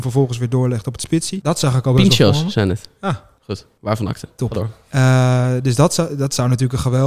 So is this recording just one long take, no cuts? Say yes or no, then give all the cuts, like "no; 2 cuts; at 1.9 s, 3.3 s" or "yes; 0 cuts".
yes; 0 cuts